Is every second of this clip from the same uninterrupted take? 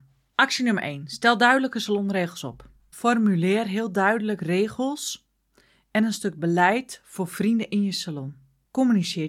yes; 0 cuts

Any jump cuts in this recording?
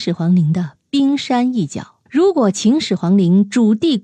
yes; 1 cut; at 2.1 s

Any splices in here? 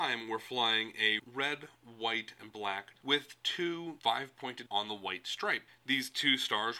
yes; 4 cuts; at 1.2 s, 3.0 s, 4.0 s, 4.7 s

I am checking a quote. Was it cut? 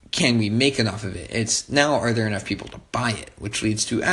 no; 0 cuts

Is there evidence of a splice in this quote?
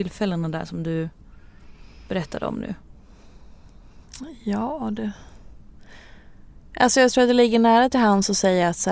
no; 0 cuts

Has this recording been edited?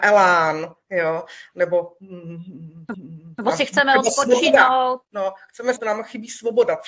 yes; 3 cuts; at 2.9 s, 5.0 s, 5.8 s

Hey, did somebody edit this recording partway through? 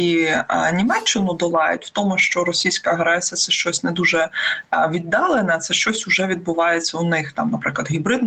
no; 0 cuts

